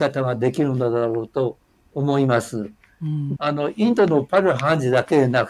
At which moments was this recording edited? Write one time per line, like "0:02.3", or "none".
0:03.4